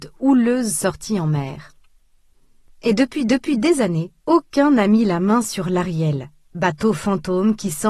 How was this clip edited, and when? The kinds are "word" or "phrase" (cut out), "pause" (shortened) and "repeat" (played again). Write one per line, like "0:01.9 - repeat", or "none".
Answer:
0:03.3 - repeat
0:04.2 - pause